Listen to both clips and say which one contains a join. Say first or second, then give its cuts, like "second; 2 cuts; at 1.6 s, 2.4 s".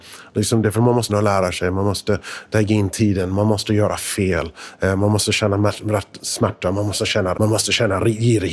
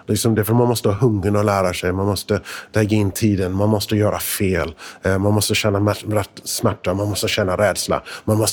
first; 2 cuts; at 1.1 s, 7.3 s